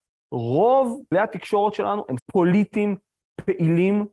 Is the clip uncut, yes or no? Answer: no